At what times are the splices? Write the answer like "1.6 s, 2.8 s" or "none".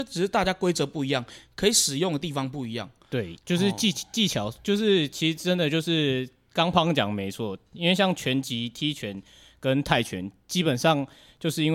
3.3 s